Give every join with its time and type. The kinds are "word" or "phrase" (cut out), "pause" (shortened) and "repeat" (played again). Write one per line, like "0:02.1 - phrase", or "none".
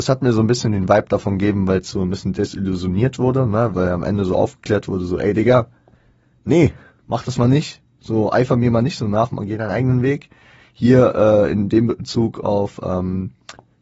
none